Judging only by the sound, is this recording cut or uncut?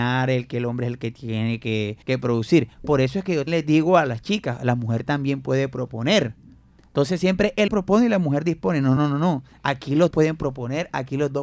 cut